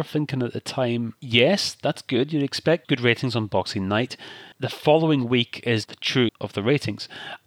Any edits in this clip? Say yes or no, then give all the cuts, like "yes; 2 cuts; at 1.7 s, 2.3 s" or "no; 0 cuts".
yes; 3 cuts; at 4.5 s, 5.9 s, 6.3 s